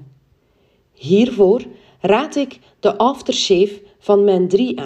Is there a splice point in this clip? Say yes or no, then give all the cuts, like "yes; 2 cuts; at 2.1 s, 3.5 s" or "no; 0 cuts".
no; 0 cuts